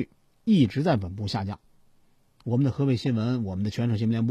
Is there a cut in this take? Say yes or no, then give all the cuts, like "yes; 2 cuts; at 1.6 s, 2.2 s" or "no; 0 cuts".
no; 0 cuts